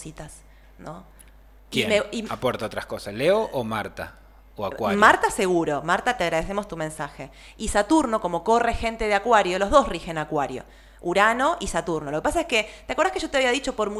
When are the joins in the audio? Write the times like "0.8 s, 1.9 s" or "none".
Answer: none